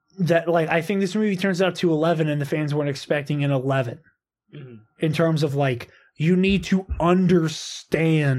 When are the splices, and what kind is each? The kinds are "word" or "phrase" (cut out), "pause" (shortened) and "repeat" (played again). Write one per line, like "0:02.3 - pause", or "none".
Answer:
none

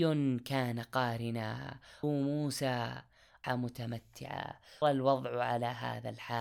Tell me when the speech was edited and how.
0:02.0 - word
0:03.4 - word
0:04.8 - word

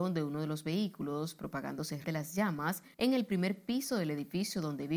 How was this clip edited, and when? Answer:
0:02.0 - word
0:02.9 - pause

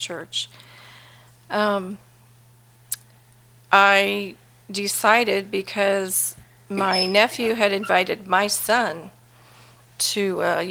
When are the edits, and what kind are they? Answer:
none

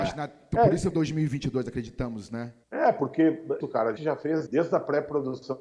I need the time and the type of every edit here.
0:00.9 - phrase
0:02.6 - pause
0:03.6 - phrase
0:04.0 - word
0:04.5 - word

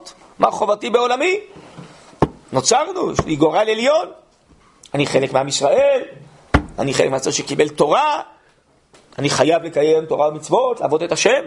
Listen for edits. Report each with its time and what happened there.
none

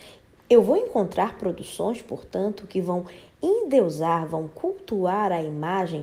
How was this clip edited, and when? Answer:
none

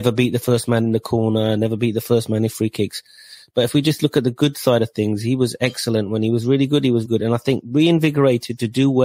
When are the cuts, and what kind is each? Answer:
0:07.1 - word

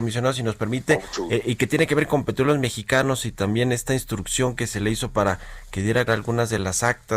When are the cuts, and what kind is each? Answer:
0:06.1 - word

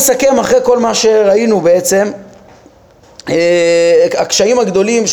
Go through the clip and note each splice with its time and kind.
none

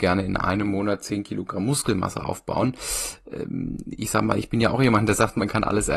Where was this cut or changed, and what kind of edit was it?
none

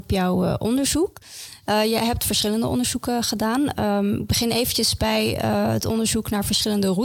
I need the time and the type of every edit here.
none

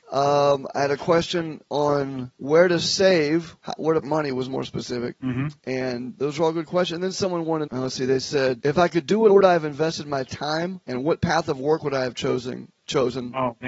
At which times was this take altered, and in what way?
0:02.4 - pause
0:04.0 - word
0:07.7 - phrase
0:08.6 - word
0:09.3 - phrase

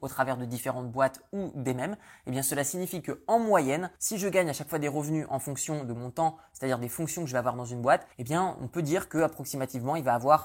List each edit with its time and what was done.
0:04.0 - pause
0:08.1 - pause

